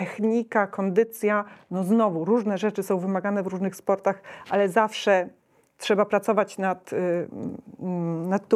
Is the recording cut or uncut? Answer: uncut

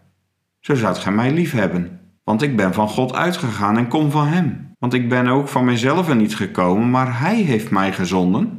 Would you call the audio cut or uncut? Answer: cut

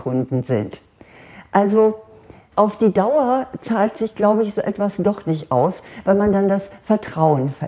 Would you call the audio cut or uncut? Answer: uncut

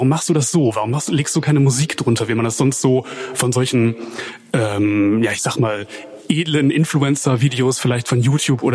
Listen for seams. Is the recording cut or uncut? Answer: uncut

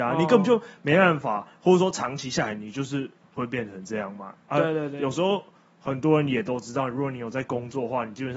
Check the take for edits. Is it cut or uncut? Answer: uncut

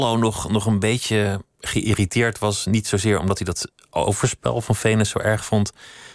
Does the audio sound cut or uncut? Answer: uncut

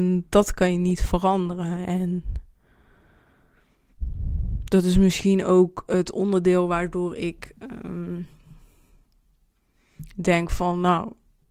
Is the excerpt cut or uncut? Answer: uncut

